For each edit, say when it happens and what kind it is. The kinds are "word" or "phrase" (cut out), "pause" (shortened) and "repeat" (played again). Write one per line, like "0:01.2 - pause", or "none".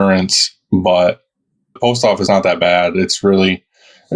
0:01.8 - word
0:02.3 - word